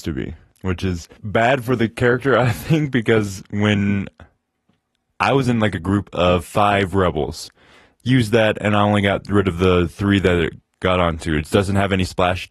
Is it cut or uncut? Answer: uncut